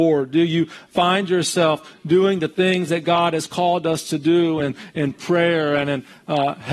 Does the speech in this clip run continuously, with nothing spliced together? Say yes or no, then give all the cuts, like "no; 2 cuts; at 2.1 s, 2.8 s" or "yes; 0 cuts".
yes; 0 cuts